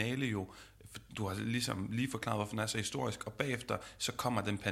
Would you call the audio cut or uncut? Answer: uncut